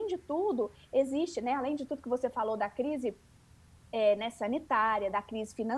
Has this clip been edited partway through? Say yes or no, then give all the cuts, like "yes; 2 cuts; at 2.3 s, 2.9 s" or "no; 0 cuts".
no; 0 cuts